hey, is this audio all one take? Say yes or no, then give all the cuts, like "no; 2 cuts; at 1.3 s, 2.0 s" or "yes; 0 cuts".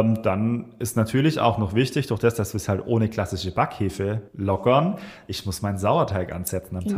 no; 1 cut; at 4.3 s